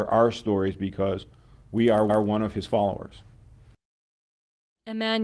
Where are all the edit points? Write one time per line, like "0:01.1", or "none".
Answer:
0:02.1